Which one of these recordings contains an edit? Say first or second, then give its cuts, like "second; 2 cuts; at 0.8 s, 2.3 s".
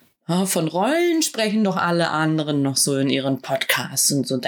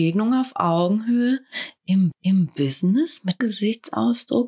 second; 2 cuts; at 2.1 s, 3.4 s